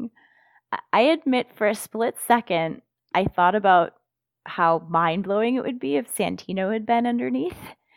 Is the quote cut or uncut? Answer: uncut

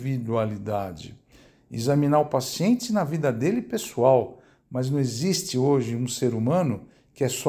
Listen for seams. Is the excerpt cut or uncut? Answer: uncut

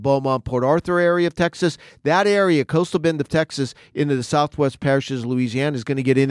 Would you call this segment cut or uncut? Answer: uncut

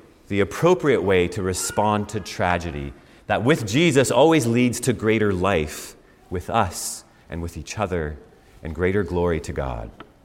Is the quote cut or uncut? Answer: uncut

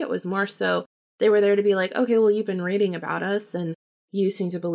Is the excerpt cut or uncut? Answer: uncut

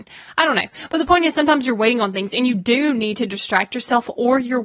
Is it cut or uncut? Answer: uncut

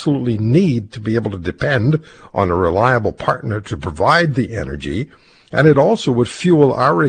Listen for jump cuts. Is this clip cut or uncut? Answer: uncut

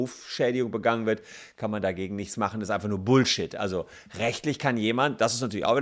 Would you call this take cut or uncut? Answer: uncut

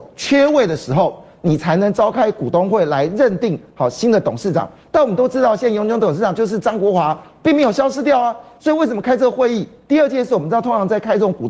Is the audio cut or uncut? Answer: uncut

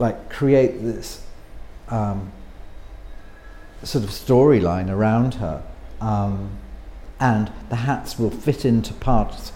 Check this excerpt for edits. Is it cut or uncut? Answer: uncut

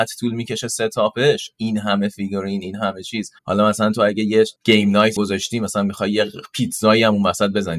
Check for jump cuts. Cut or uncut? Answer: cut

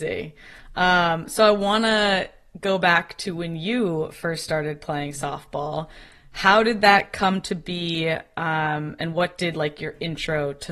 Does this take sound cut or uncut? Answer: uncut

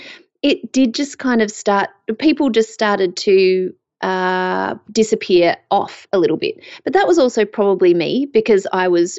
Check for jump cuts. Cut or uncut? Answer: uncut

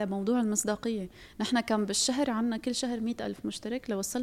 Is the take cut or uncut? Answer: uncut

